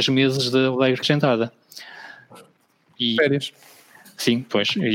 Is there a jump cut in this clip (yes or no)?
yes